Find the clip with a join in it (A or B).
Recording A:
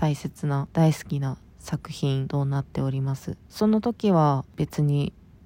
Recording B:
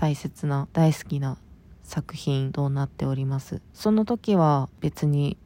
A